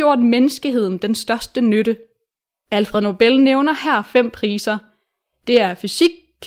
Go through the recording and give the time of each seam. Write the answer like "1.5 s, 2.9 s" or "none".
none